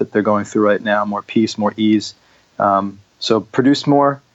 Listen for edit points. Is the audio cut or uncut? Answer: uncut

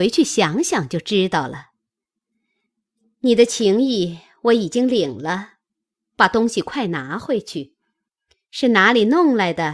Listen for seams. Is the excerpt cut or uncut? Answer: uncut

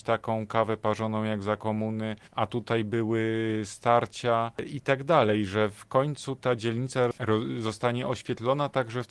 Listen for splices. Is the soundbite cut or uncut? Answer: cut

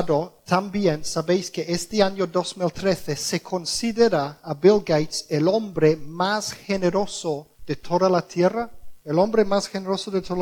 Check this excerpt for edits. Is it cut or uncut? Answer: cut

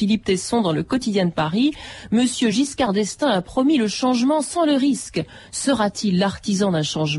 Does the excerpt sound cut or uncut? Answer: uncut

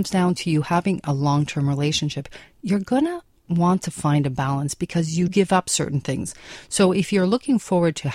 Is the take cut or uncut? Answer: cut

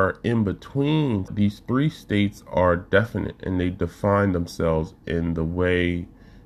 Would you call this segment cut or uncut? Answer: cut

